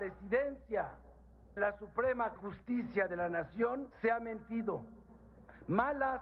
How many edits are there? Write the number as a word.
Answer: three